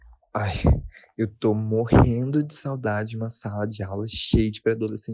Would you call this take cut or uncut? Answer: uncut